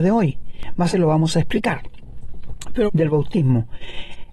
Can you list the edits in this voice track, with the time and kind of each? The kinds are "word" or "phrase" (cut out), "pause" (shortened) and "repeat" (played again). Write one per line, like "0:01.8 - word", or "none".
0:00.9 - word
0:02.9 - word